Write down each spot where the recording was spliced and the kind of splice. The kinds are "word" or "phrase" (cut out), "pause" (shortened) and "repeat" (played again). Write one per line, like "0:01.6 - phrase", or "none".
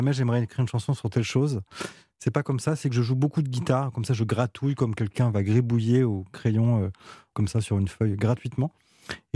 none